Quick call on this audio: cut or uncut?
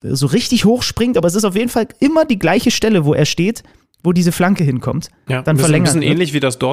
uncut